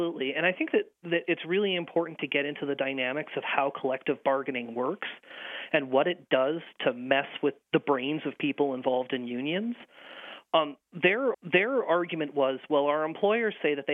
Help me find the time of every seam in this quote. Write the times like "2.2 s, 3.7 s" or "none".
11.3 s